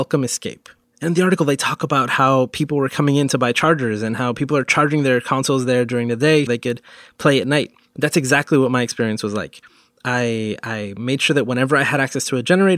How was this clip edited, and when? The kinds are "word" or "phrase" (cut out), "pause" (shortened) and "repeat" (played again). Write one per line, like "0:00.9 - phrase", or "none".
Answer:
0:06.5 - word

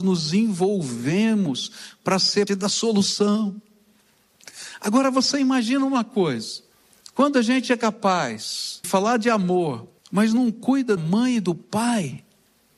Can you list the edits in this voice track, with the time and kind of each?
0:02.5 - word
0:06.7 - pause
0:08.8 - word
0:10.0 - pause
0:11.0 - word

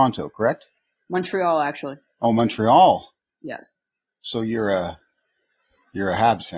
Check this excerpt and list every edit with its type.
none

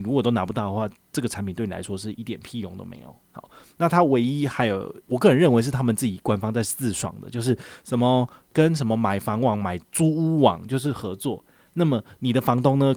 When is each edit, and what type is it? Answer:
0:03.2 - pause
0:05.0 - pause

